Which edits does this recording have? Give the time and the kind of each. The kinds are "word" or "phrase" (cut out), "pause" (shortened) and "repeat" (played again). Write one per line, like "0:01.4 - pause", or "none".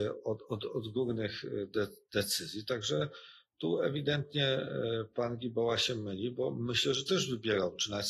none